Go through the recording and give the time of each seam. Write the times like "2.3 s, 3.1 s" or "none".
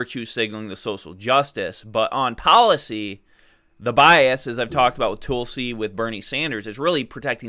none

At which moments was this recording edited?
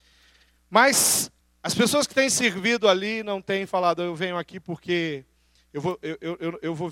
1.4 s

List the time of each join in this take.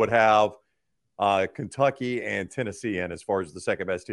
none

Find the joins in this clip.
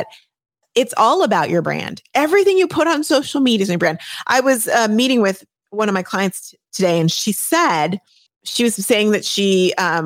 8.3 s

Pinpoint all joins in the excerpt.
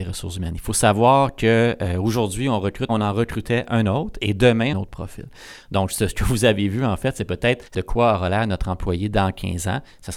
2.9 s, 4.7 s, 7.7 s

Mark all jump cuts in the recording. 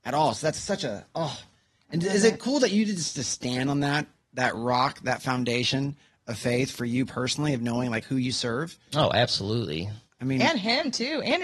none

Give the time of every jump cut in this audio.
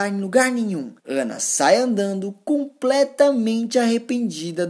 1.0 s

